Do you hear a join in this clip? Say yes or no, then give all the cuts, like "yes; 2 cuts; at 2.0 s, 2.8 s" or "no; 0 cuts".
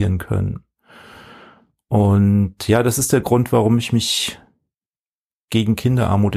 no; 0 cuts